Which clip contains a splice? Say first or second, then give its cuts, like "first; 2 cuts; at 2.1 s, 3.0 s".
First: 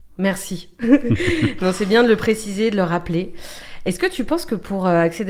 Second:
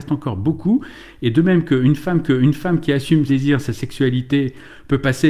second; 2 cuts; at 2.2 s, 3.3 s